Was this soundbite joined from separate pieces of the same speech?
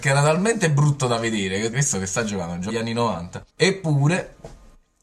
yes; 3 cuts; at 1.7 s, 2.7 s, 3.5 s

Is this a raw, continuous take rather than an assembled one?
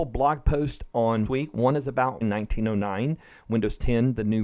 no; 2 cuts; at 1.2 s, 2.2 s

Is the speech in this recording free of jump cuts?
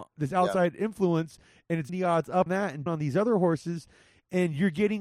no; 3 cuts; at 1.9 s, 2.5 s, 2.9 s

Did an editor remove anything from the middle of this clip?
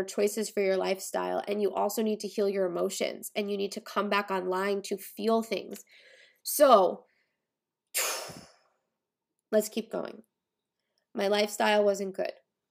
no; 0 cuts

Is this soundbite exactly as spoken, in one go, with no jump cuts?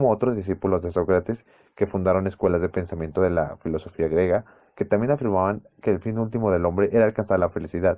yes; 0 cuts

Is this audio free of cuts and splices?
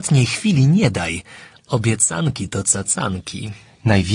yes; 0 cuts

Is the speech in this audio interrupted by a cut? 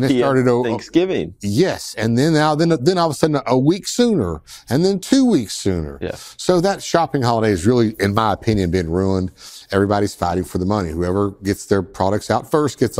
no; 0 cuts

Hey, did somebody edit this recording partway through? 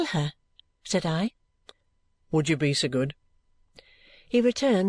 no; 0 cuts

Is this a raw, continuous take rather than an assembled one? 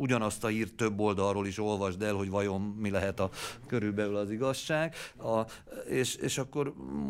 yes; 0 cuts

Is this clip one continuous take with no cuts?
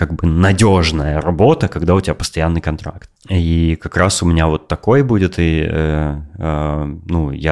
yes; 0 cuts

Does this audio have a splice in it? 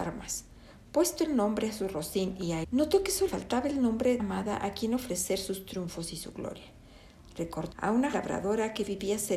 yes; 5 cuts; at 2.6 s, 3.3 s, 4.2 s, 7.7 s, 8.1 s

